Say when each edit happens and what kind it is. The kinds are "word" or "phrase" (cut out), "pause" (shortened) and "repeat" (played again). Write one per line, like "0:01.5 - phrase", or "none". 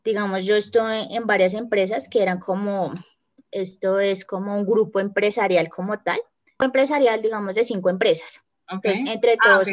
none